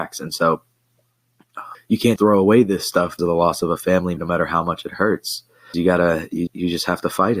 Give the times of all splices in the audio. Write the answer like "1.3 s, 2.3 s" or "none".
1.7 s, 2.2 s, 3.2 s, 4.2 s, 5.7 s, 6.5 s